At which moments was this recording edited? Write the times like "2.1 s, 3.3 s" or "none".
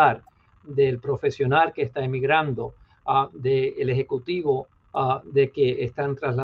none